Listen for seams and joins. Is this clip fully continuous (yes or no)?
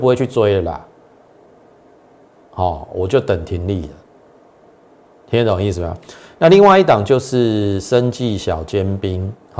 yes